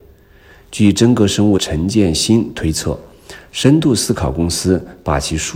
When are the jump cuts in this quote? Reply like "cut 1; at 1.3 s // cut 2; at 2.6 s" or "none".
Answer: cut 1; at 1.6 s